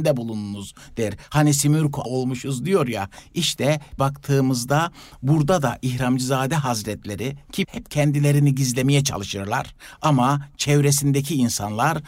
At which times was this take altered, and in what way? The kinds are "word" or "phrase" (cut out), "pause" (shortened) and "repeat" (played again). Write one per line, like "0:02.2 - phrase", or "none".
0:02.0 - word
0:04.0 - word
0:07.6 - word